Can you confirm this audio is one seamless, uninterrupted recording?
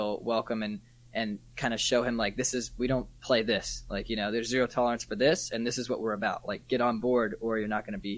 yes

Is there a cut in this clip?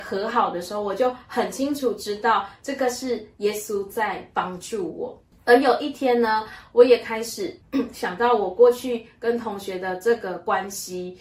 yes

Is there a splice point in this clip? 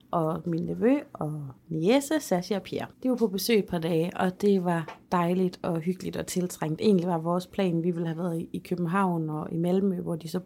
yes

